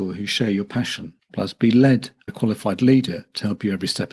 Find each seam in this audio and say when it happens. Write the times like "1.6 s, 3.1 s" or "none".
2.3 s